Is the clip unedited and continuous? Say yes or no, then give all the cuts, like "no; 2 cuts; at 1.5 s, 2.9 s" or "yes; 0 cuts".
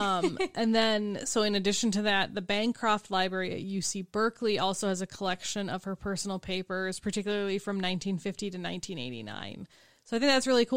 yes; 0 cuts